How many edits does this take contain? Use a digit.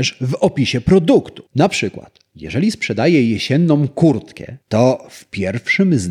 2